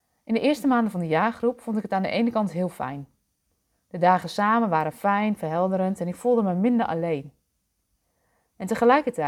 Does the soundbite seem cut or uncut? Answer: uncut